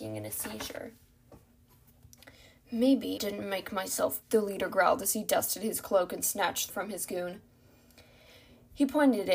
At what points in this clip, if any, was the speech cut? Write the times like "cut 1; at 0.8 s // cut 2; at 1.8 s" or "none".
cut 1; at 3.2 s // cut 2; at 4.2 s // cut 3; at 6.7 s

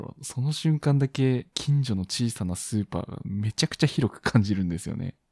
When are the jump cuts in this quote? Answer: cut 1; at 1.5 s

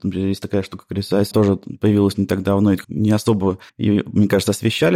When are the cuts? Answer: cut 1; at 1.3 s // cut 2; at 2.8 s // cut 3; at 3.7 s

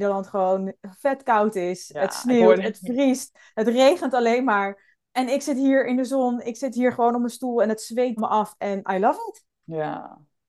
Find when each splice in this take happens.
cut 1; at 8.2 s

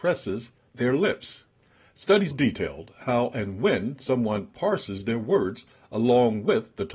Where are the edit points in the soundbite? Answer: cut 1; at 2.3 s

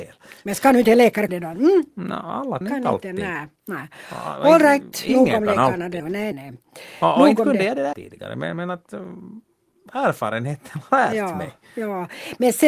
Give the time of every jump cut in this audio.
cut 1; at 1.3 s // cut 2; at 2.6 s // cut 3; at 6.0 s // cut 4; at 6.3 s // cut 5; at 7.9 s // cut 6; at 10.9 s

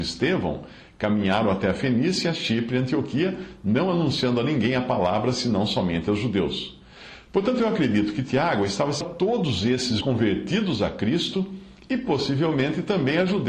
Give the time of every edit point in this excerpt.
cut 1; at 9.0 s // cut 2; at 10.0 s

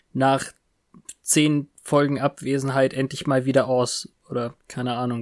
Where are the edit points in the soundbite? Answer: none

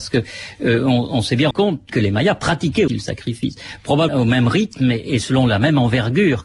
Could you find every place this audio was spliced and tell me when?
cut 1; at 1.5 s // cut 2; at 1.9 s // cut 3; at 2.9 s // cut 4; at 4.1 s

